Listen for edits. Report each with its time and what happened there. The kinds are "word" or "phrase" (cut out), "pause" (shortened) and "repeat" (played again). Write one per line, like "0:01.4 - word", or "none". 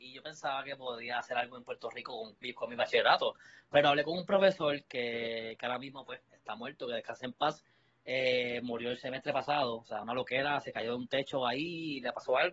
none

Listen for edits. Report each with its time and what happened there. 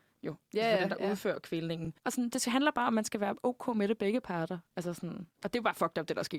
0:05.3 - pause

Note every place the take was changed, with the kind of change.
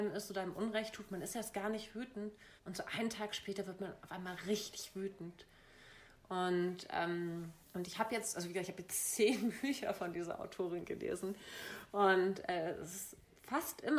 0:02.6 - pause
0:07.6 - pause

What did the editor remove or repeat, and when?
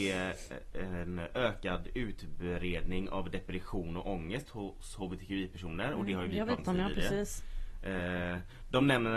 0:06.6 - word

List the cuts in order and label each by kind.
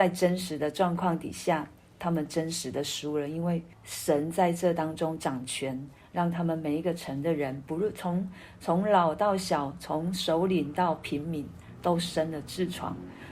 0:03.7 - pause

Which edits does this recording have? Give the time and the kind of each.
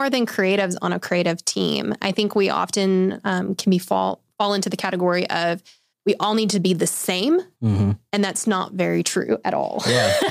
none

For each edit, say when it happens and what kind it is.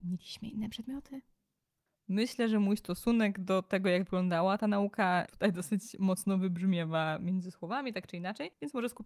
none

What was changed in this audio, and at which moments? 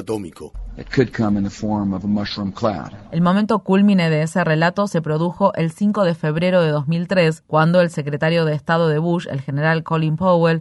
none

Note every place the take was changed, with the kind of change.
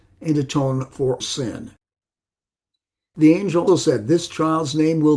0:01.2 - word
0:03.7 - word

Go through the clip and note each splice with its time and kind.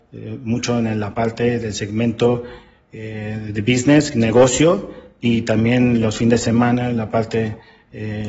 none

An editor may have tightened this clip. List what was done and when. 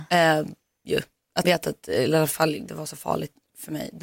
0:01.4 - word
0:02.7 - word

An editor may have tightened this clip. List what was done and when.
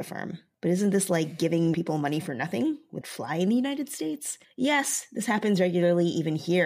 0:01.7 - word
0:03.0 - word

